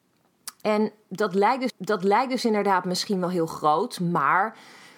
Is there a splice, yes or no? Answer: yes